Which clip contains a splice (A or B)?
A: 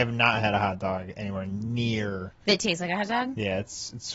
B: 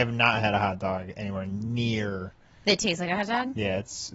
A